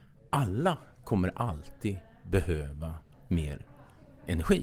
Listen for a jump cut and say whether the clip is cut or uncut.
uncut